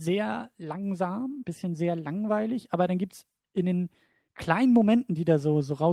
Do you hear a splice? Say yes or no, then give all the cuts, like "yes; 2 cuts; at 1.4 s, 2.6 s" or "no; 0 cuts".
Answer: no; 0 cuts